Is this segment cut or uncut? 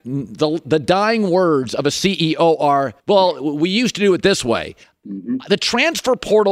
cut